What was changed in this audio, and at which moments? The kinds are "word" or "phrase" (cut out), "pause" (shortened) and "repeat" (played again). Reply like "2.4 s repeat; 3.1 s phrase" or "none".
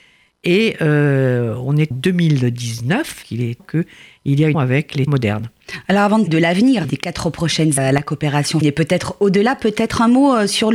1.9 s word; 3.2 s word; 3.6 s word; 4.5 s word; 5.1 s word; 6.3 s word; 6.8 s word; 7.8 s word; 8.6 s word